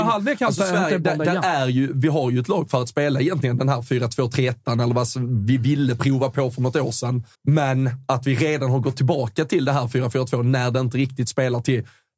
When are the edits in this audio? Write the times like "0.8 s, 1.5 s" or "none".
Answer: 7.3 s